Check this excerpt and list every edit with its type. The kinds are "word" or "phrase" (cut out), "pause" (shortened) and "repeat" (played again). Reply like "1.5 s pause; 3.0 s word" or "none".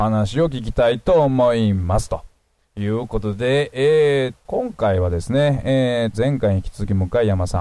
4.4 s word; 6.1 s word